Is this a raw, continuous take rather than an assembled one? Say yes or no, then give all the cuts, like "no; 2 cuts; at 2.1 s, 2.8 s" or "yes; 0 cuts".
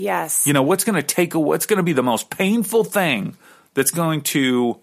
yes; 0 cuts